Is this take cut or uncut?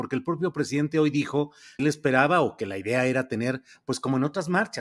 cut